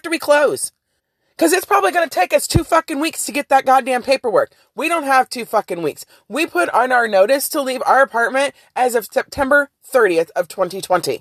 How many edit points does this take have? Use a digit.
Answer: 1